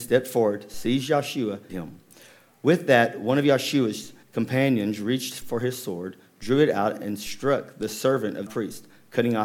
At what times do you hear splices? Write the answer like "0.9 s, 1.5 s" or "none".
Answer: 1.7 s, 4.2 s, 8.5 s